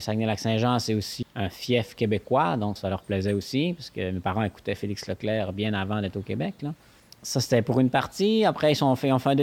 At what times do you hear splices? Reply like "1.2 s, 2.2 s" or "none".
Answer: 1.2 s, 2.8 s